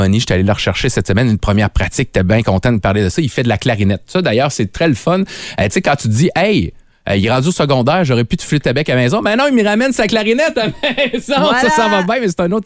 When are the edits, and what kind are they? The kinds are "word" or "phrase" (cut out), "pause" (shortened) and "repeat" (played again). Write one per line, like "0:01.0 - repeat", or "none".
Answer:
none